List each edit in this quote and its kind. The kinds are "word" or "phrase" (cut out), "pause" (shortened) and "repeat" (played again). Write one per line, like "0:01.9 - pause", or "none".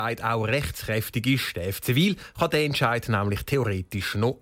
none